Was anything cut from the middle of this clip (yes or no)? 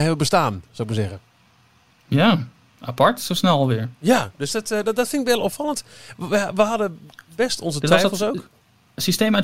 no